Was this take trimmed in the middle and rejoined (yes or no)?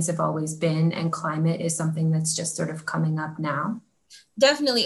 no